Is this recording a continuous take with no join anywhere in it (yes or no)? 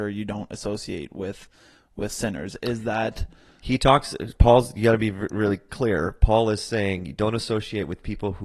yes